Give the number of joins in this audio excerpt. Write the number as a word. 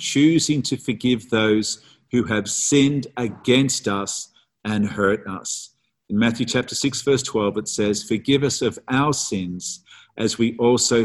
zero